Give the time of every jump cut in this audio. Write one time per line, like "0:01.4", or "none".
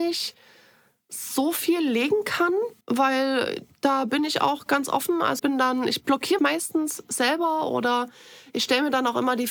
0:02.8
0:05.4
0:06.4